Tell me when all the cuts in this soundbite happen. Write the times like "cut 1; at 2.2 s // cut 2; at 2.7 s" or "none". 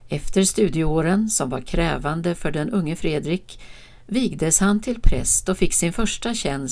none